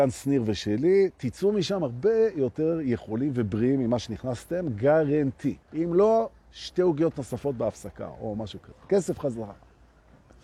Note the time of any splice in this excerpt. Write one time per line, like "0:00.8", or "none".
0:05.6